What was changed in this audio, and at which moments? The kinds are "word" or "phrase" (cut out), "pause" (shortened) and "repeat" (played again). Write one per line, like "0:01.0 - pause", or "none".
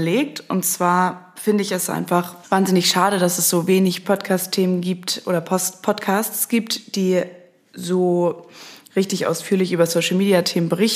none